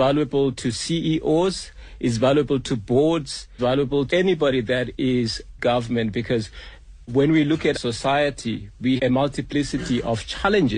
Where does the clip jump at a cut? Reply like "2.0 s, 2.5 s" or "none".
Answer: 3.6 s, 4.1 s, 5.6 s, 7.1 s, 7.7 s, 9.0 s